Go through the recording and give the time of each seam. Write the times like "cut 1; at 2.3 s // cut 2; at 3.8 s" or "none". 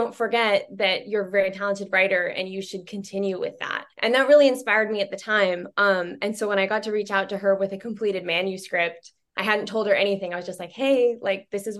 cut 1; at 3.9 s